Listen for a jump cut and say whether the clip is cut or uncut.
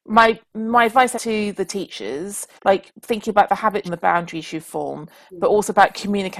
cut